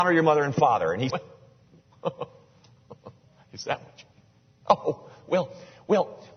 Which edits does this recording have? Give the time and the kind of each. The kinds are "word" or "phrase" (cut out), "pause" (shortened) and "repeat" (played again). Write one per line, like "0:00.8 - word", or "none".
0:01.1 - word